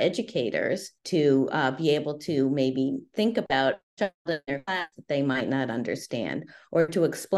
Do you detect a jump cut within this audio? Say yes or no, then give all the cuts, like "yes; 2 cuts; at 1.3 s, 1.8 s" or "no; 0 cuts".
yes; 1 cut; at 1.0 s